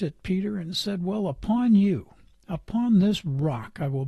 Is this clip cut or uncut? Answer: uncut